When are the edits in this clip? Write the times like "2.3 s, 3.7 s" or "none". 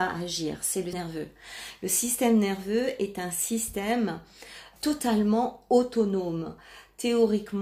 0.9 s, 4.8 s